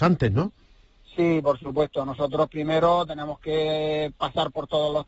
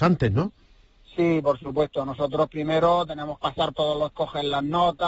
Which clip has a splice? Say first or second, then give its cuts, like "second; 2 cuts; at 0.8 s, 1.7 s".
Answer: second; 3 cuts; at 3.4 s, 3.7 s, 4.1 s